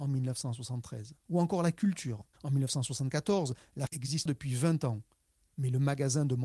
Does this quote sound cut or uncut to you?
cut